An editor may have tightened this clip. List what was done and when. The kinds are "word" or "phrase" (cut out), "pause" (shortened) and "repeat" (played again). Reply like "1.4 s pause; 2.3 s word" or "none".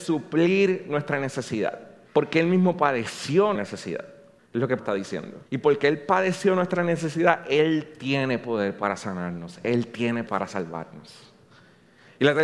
2.1 s pause; 3.5 s word; 4.4 s pause; 4.8 s word; 5.5 s pause; 10.3 s word